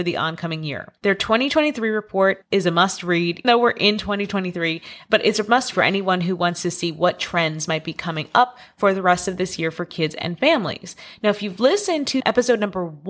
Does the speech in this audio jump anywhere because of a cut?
yes; 3 cuts; at 1.0 s, 3.4 s, 5.7 s

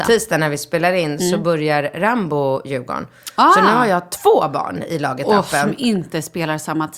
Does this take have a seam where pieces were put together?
no; 0 cuts

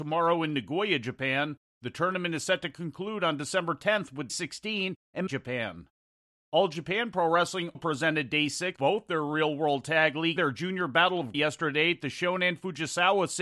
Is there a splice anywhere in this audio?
yes; 6 cuts; at 4.3 s, 5.3 s, 7.7 s, 8.8 s, 10.4 s, 11.3 s

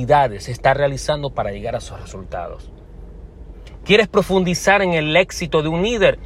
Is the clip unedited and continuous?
yes; 0 cuts

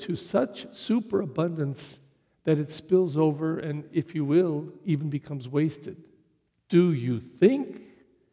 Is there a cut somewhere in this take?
yes; 1 cut; at 6.5 s

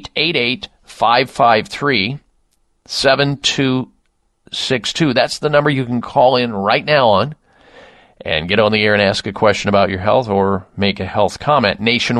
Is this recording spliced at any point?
no; 0 cuts

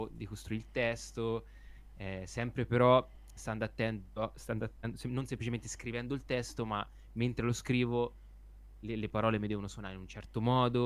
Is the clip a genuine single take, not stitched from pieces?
yes; 0 cuts

